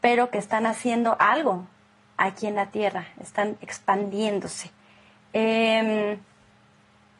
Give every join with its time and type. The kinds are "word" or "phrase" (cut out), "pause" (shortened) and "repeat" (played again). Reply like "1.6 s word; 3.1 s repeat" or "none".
none